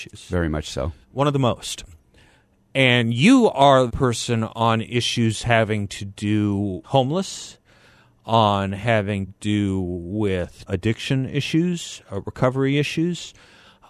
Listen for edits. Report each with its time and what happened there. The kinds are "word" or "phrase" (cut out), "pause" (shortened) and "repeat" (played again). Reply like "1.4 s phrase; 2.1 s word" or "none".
1.0 s pause; 3.9 s word; 6.8 s word; 9.3 s word; 10.7 s phrase